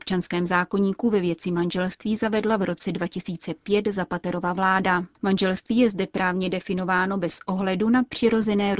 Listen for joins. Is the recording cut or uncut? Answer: cut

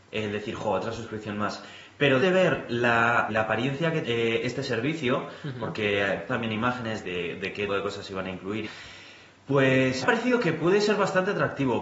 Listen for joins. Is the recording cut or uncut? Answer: cut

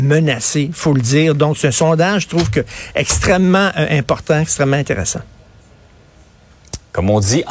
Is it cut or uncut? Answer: uncut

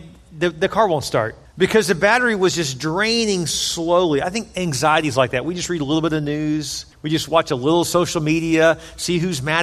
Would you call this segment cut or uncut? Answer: cut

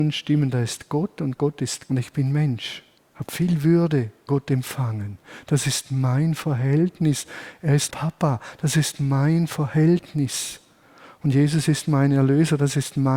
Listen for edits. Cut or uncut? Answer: cut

